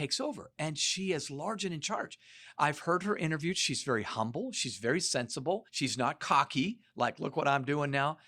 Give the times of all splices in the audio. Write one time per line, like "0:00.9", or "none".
0:05.7

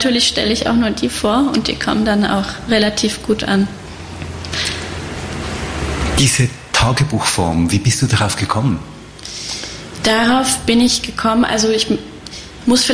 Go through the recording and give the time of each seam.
none

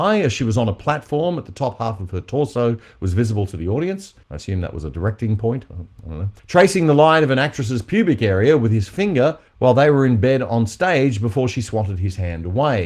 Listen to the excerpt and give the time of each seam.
0:04.2
0:06.4
0:09.5

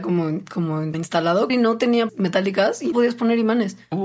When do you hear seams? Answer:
0:00.9
0:01.5
0:02.1
0:02.9

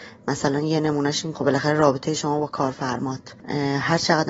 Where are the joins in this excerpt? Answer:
0:01.3

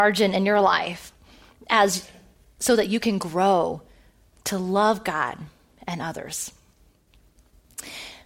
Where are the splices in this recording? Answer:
none

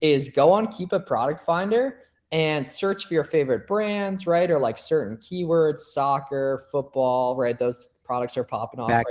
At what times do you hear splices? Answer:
none

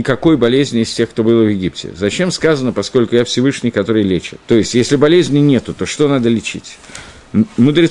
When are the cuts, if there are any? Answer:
0:04.4

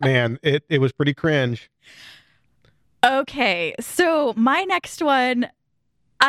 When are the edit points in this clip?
none

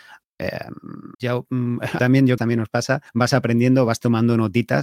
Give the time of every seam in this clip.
0:01.1
0:02.0
0:02.4
0:03.1

